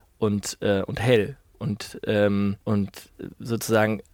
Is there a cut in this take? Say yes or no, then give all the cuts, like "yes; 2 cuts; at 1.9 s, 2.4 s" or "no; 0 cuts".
yes; 1 cut; at 2.6 s